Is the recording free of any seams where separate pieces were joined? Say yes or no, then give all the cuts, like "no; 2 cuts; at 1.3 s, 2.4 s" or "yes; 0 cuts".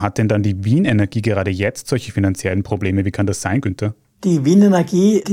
yes; 0 cuts